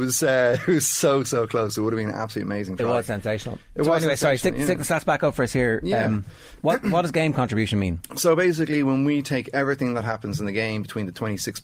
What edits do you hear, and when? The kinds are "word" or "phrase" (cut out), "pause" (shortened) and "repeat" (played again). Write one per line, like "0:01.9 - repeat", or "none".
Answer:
none